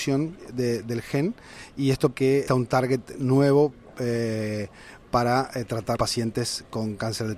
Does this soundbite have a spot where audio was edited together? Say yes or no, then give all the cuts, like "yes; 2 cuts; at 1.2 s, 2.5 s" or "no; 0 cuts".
yes; 3 cuts; at 2.1 s, 2.5 s, 6.0 s